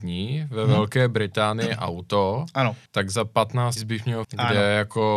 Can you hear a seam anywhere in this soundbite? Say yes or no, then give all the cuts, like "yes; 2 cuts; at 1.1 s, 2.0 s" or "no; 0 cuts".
yes; 3 cuts; at 2.9 s, 3.8 s, 4.2 s